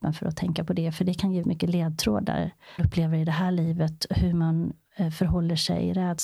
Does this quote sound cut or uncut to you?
cut